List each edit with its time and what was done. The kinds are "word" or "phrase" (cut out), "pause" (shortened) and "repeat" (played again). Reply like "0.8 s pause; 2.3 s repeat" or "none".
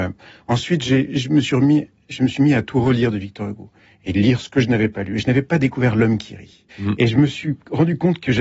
6.7 s pause